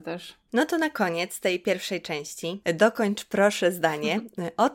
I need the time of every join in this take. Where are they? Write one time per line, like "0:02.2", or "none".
none